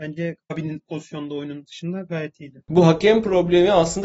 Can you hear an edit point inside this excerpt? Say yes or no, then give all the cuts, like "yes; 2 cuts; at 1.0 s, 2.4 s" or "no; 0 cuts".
yes; 1 cut; at 1.7 s